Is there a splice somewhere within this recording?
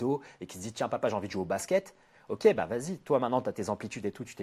no; 0 cuts

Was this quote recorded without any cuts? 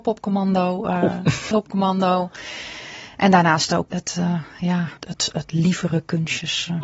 no; 3 cuts; at 1.5 s, 3.9 s, 5.0 s

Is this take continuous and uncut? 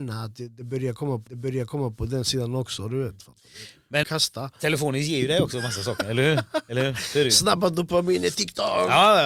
no; 2 cuts; at 1.3 s, 4.0 s

